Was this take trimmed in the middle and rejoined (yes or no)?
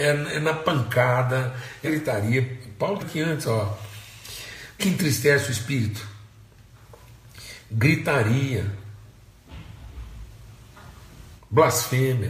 yes